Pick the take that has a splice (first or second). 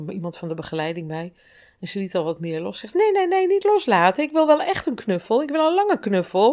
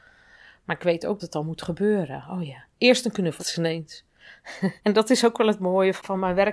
second